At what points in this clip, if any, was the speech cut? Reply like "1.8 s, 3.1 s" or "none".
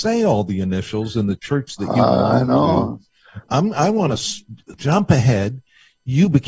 none